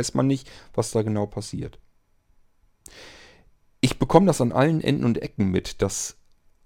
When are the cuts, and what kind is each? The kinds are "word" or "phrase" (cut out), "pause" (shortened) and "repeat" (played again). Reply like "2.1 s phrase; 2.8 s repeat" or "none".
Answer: none